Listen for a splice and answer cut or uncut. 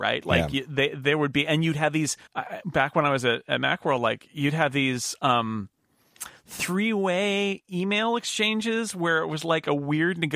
cut